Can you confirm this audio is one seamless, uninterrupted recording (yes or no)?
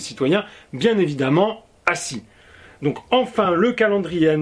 yes